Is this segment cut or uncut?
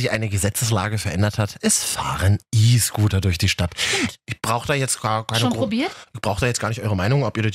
uncut